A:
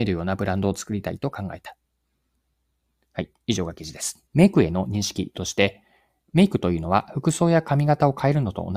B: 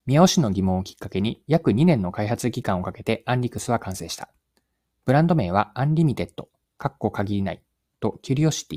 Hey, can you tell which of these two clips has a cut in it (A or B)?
A